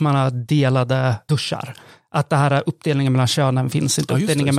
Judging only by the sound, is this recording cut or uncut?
uncut